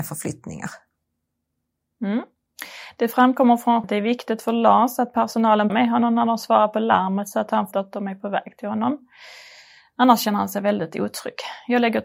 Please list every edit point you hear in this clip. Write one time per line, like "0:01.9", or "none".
0:03.8
0:05.7
0:07.7